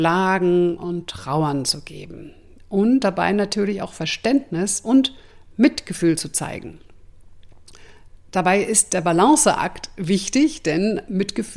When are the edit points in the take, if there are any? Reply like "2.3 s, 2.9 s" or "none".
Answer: none